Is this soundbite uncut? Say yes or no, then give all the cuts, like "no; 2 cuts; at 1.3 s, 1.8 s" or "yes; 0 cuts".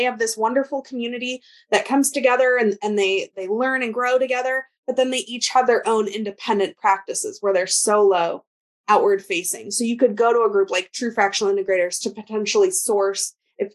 yes; 0 cuts